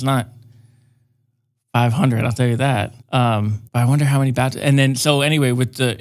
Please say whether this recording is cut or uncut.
cut